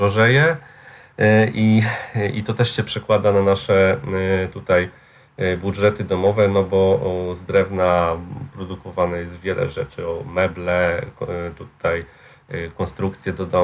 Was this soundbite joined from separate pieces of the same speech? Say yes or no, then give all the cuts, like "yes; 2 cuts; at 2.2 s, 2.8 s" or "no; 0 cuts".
no; 0 cuts